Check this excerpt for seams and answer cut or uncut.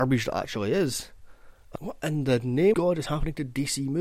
cut